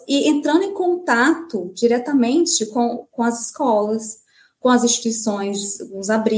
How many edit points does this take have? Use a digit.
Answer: 0